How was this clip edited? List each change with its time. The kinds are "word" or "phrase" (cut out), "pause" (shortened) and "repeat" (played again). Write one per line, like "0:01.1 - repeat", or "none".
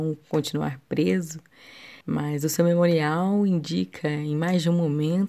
0:02.0 - pause